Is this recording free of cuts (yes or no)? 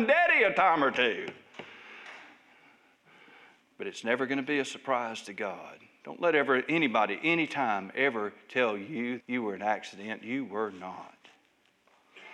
no